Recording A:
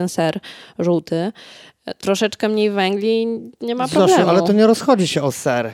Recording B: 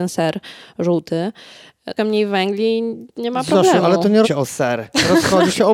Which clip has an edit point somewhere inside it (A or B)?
B